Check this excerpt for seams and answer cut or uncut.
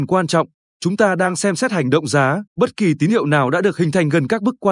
cut